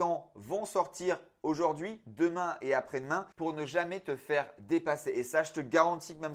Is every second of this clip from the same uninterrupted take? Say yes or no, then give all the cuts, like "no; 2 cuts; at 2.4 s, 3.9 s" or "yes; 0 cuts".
no; 1 cut; at 3.3 s